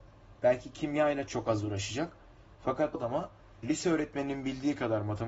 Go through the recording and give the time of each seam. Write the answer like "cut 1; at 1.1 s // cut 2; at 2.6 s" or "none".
cut 1; at 1.3 s // cut 2; at 2.9 s // cut 3; at 3.6 s